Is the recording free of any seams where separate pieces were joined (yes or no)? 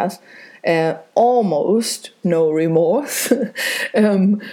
no